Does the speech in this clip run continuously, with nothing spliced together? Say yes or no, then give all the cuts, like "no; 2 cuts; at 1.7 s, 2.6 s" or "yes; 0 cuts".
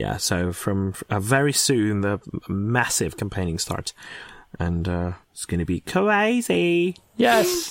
no; 1 cut; at 5.2 s